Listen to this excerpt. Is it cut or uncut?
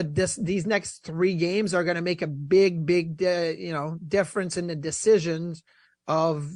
uncut